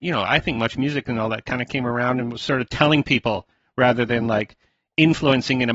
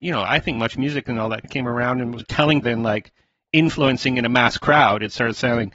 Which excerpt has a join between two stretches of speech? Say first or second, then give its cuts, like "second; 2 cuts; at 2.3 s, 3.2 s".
second; 3 cuts; at 1.4 s, 2.2 s, 2.6 s